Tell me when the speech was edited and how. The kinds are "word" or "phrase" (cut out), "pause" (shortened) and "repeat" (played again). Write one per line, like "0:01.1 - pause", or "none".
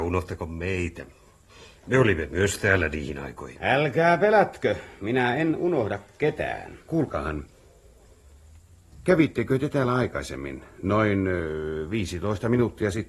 0:06.8 - pause